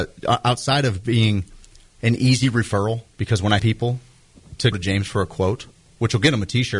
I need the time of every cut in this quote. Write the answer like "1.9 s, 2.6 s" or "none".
3.6 s, 4.7 s